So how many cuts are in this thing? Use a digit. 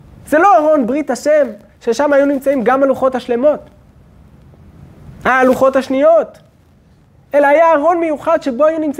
0